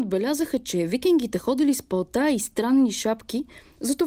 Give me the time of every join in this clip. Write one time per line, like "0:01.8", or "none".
none

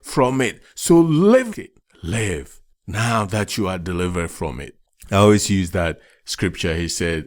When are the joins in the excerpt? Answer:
0:01.5

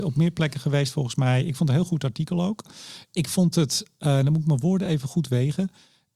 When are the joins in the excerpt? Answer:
none

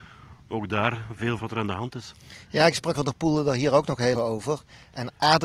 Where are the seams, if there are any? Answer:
0:01.4
0:02.9
0:04.1

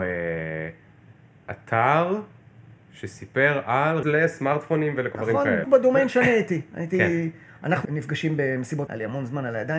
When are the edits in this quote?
0:04.0
0:05.1
0:05.6
0:07.8
0:08.9

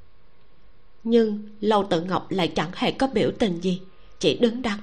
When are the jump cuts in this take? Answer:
none

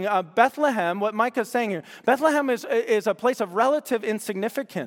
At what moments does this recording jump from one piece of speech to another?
none

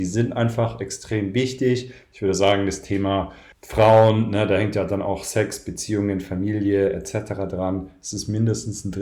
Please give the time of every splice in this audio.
0:03.5

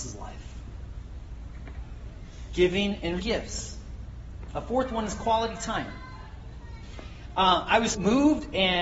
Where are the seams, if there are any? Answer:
0:03.2
0:07.9

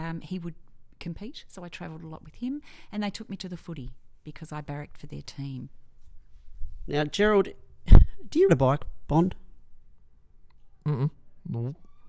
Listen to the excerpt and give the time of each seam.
0:08.5

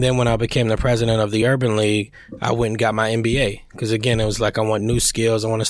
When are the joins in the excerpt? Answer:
none

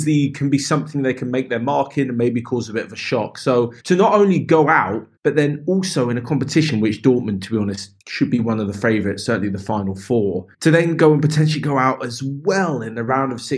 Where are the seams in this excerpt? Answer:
0:03.8
0:05.2
0:08.0
0:10.5

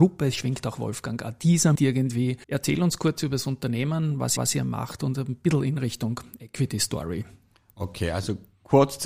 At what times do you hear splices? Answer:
0:01.7
0:02.4
0:04.4

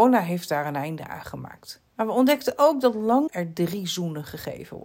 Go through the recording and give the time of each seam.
0:01.9
0:03.3

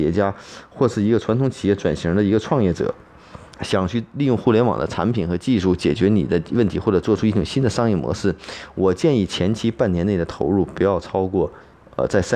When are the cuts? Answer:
0:03.5

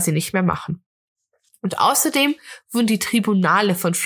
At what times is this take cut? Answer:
none

